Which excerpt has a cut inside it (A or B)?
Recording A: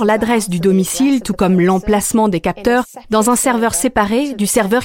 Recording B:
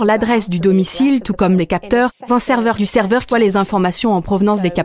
B